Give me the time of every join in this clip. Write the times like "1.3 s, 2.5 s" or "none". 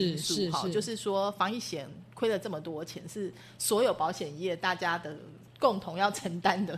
5.5 s